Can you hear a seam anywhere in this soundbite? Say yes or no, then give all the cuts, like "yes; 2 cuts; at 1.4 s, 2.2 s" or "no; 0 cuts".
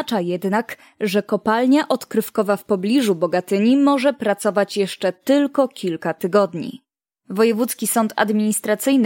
no; 0 cuts